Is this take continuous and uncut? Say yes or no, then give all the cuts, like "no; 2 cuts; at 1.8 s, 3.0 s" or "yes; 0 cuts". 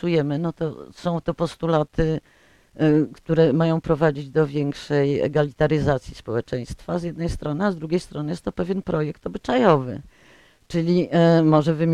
yes; 0 cuts